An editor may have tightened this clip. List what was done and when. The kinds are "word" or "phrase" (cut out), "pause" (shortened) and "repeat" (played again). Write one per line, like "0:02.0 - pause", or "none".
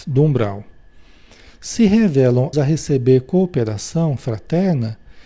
0:02.5 - word